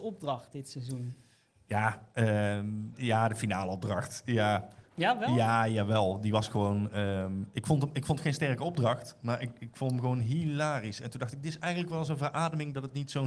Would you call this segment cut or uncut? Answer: uncut